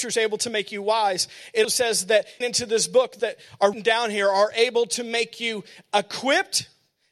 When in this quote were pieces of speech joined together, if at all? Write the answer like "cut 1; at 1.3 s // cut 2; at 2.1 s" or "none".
cut 1; at 1.6 s // cut 2; at 2.4 s // cut 3; at 3.2 s // cut 4; at 3.7 s